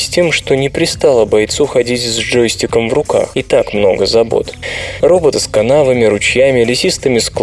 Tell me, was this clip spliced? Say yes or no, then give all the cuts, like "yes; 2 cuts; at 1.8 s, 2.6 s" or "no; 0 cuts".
yes; 1 cut; at 5.3 s